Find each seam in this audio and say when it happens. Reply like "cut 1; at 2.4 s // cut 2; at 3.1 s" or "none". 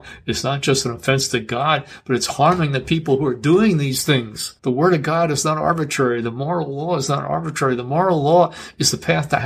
cut 1; at 4.6 s